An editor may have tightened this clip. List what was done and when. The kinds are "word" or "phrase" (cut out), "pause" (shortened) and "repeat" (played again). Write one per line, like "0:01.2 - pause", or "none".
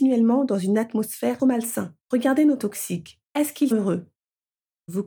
0:01.4 - phrase
0:02.0 - pause
0:02.6 - word
0:03.3 - pause
0:03.7 - word